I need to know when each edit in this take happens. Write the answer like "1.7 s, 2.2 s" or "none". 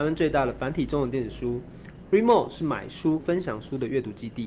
3.2 s